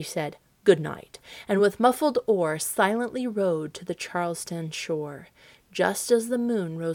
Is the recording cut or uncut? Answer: uncut